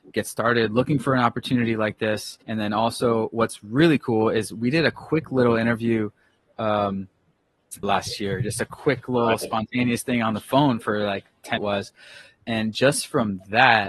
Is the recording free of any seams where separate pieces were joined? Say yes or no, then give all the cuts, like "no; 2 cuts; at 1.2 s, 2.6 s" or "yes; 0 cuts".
no; 3 cuts; at 2.4 s, 7.8 s, 11.6 s